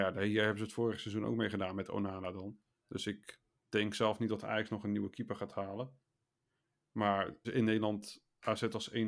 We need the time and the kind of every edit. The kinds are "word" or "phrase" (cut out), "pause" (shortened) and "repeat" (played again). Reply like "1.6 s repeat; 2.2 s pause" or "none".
3.6 s pause; 7.4 s phrase